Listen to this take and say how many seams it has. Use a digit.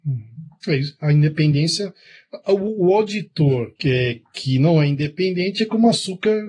1